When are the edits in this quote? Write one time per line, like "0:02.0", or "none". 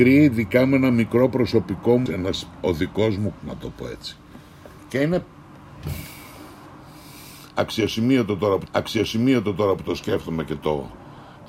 0:02.1
0:03.4
0:04.8
0:08.7

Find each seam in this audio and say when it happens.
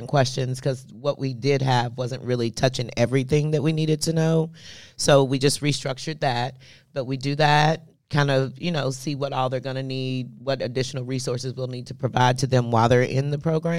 none

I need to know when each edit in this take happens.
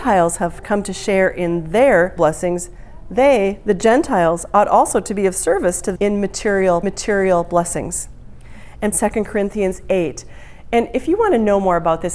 0:02.2
0:06.0
0:06.8
0:08.9

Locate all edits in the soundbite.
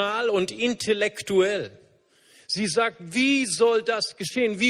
none

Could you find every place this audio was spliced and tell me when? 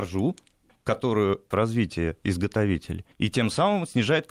0:01.5
0:03.1

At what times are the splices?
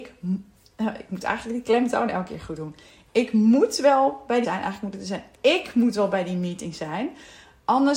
0:04.4

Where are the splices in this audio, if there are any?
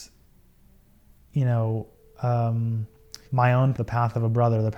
0:03.2
0:03.7

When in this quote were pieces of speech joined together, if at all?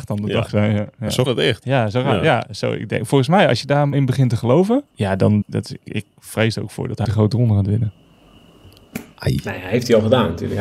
0:01.3
0:03.9
0:04.9
0:05.4
0:05.8
0:07.0

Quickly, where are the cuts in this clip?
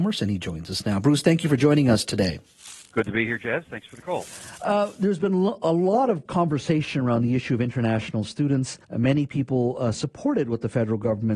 0:06.3
0:08.8

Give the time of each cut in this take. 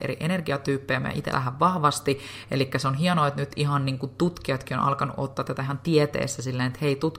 0:01.3

